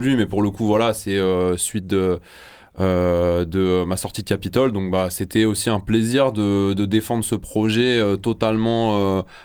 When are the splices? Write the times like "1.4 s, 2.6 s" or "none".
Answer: none